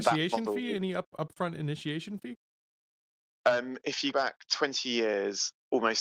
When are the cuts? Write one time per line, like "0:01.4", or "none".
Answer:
0:04.1